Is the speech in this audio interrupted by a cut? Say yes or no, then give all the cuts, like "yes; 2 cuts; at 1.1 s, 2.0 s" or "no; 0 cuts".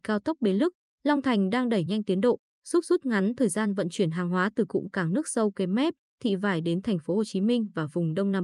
no; 0 cuts